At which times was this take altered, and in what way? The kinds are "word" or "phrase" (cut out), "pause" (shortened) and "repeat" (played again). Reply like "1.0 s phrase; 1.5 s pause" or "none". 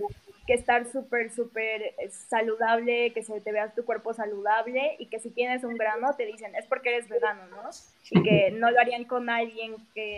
none

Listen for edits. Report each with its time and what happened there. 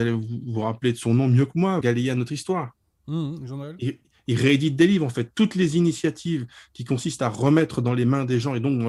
1.8 s word

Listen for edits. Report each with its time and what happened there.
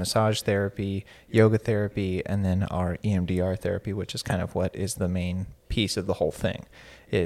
none

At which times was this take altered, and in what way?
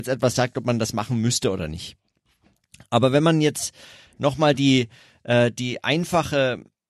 none

